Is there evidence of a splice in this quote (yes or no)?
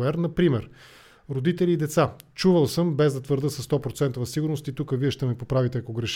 no